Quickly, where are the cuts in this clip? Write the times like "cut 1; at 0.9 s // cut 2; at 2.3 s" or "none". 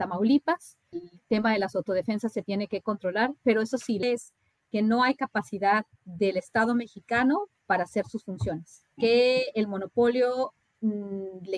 cut 1; at 0.9 s // cut 2; at 4.0 s // cut 3; at 6.0 s // cut 4; at 8.9 s